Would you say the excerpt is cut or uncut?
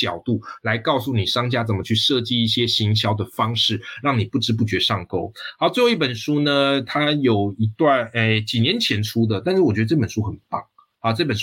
uncut